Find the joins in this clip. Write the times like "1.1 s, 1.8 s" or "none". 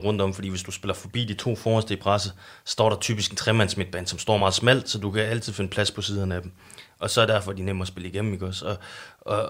none